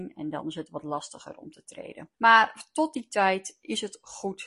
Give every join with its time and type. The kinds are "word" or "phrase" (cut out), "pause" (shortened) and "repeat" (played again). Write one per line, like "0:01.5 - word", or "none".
0:02.1 - pause

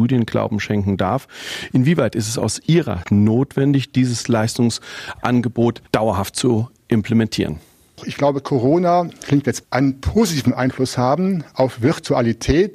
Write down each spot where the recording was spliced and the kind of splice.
0:03.0 - word
0:05.9 - pause
0:09.1 - phrase
0:09.6 - word

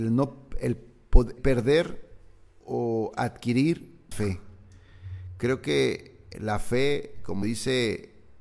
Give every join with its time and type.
0:01.4 - word
0:02.6 - word
0:04.1 - word
0:06.3 - word
0:07.4 - word

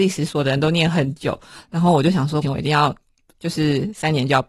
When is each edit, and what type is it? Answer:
0:02.4 - phrase

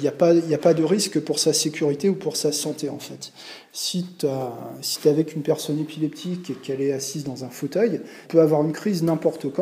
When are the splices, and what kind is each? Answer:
0:08.2 - word

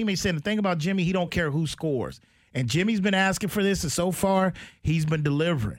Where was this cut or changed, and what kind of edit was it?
none

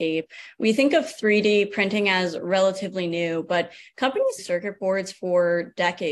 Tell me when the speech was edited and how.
0:04.4 - phrase

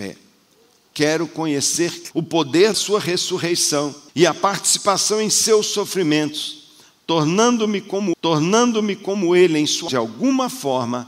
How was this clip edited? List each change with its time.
0:02.1 - word
0:02.7 - word
0:04.1 - pause
0:08.1 - repeat
0:09.9 - phrase

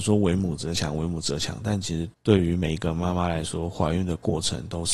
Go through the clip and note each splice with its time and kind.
0:02.1 - pause

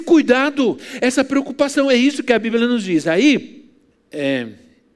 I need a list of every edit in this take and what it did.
0:03.9 - word

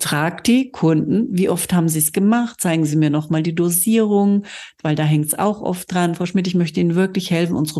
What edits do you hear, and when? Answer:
none

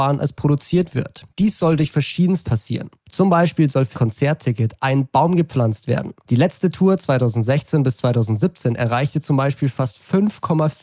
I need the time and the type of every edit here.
0:02.4 - word
0:03.9 - phrase

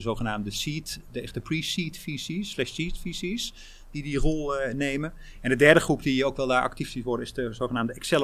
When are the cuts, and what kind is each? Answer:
none

